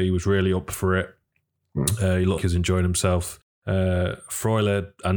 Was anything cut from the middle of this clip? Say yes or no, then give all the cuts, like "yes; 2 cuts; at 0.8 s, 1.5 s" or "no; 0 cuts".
yes; 2 cuts; at 2.4 s, 3.4 s